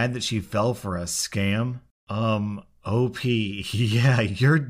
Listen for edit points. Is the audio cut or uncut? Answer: uncut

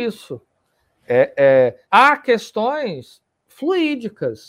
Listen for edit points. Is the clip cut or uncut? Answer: cut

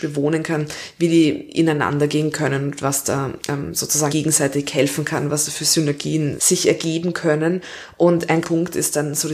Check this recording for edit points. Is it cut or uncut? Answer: cut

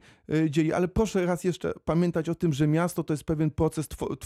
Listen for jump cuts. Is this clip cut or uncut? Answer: uncut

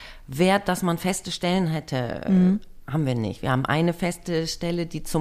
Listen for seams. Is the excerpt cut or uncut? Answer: uncut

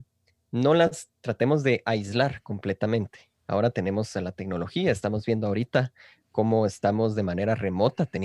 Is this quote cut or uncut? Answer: uncut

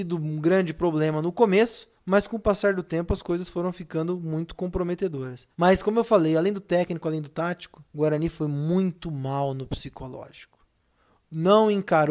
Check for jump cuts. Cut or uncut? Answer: cut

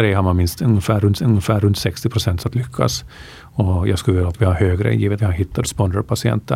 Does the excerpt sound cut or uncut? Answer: cut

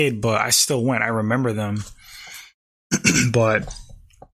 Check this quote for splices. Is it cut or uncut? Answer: uncut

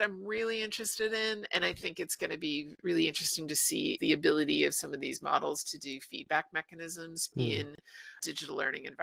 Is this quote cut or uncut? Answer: cut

